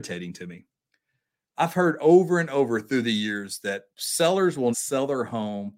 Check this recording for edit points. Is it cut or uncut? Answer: cut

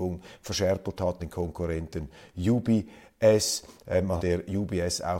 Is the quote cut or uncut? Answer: cut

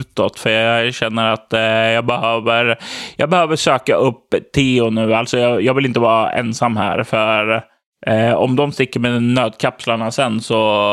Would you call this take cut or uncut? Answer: uncut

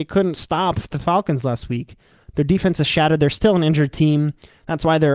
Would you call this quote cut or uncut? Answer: uncut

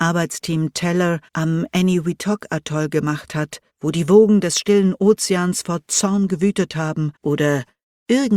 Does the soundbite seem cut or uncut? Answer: cut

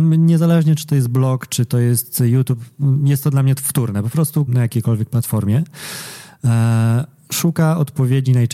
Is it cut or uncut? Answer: cut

